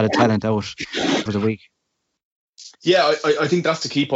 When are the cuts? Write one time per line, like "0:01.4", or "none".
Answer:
0:01.3
0:02.7